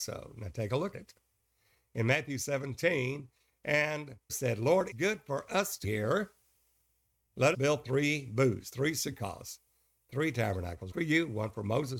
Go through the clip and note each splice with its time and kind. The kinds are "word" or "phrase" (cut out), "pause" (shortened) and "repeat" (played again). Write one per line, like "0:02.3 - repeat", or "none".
0:00.9 - word
0:04.3 - word
0:04.9 - word
0:05.8 - word
0:07.5 - word
0:10.9 - word